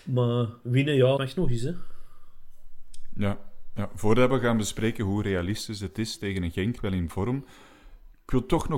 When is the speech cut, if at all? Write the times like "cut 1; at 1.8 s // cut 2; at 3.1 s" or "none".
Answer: cut 1; at 1.2 s // cut 2; at 6.8 s